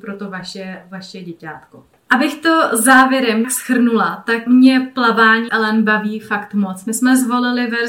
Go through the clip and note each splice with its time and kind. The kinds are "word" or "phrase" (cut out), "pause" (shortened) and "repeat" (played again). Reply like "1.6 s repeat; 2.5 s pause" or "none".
3.4 s word; 4.5 s word; 5.5 s word